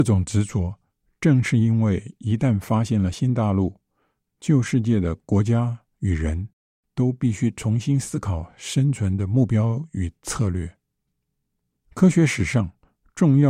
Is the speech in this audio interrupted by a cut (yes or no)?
no